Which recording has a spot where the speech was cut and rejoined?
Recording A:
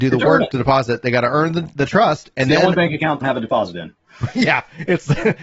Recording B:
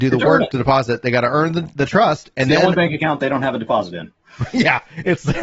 A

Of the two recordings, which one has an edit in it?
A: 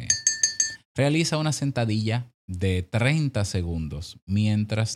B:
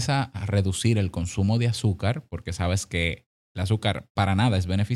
A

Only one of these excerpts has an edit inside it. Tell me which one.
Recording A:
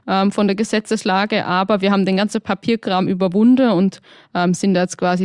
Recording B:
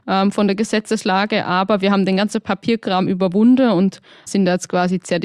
B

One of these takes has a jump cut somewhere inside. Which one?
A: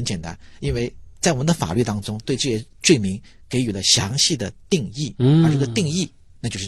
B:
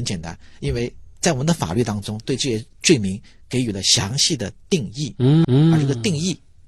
B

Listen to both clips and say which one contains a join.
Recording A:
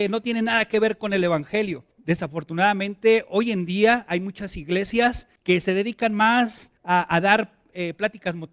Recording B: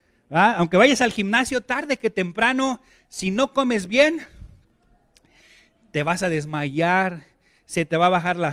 A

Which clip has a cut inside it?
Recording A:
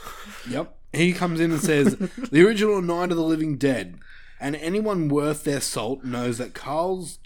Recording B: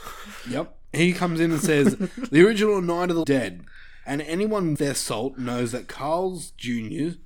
B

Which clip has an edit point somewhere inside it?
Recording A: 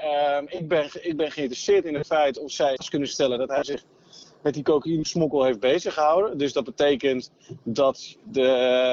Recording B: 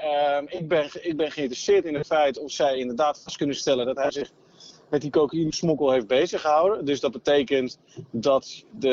A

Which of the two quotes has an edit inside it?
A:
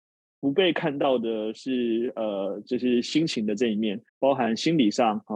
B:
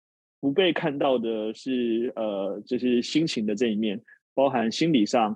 A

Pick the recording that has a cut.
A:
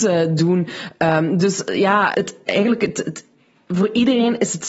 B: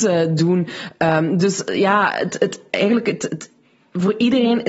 A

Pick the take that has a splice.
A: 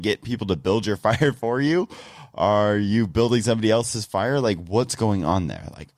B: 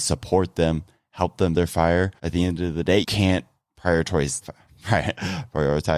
B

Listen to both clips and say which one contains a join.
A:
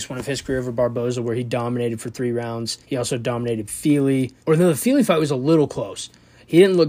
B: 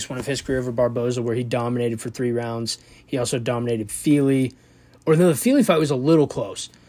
A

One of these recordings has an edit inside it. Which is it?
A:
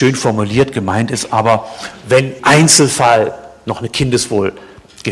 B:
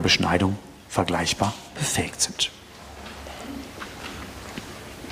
A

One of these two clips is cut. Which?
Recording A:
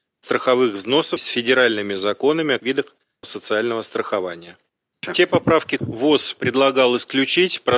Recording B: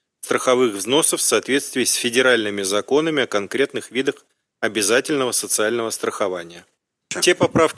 A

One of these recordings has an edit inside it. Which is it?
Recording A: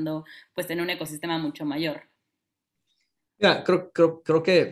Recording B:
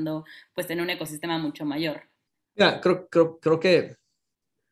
B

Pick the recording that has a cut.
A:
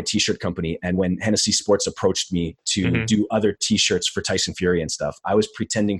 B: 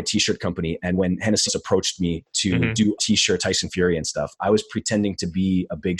B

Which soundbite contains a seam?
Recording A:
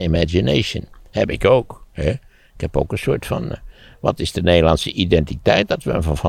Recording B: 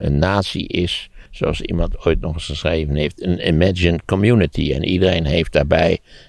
B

